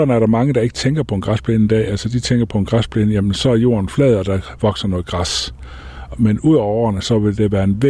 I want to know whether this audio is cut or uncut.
uncut